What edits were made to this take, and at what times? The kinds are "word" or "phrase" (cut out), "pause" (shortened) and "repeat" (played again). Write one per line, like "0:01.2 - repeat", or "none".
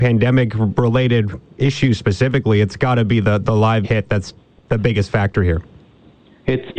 0:03.8 - word